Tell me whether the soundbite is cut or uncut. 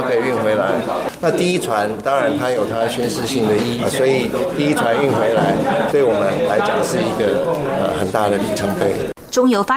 cut